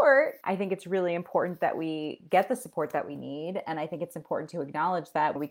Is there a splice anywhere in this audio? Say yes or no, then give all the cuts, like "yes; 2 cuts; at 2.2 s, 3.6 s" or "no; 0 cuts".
no; 0 cuts